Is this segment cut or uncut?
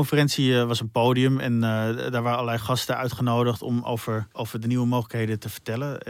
cut